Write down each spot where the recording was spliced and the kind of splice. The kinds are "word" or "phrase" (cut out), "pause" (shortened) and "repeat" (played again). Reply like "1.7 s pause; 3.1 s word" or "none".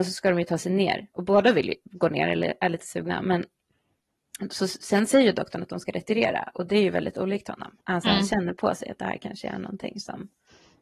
7.8 s pause